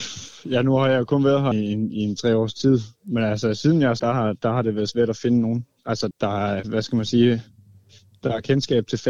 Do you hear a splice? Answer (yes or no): yes